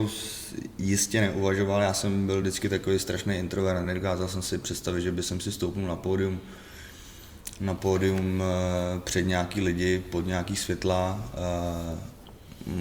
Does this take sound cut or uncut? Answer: uncut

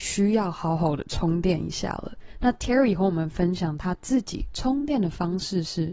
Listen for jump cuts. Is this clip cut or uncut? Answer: uncut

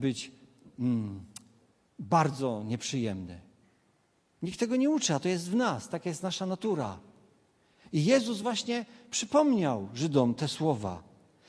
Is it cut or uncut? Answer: uncut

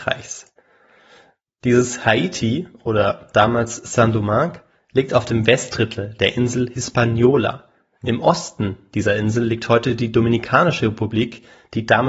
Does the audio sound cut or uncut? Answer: uncut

